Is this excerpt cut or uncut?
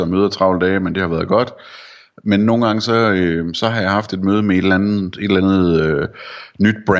uncut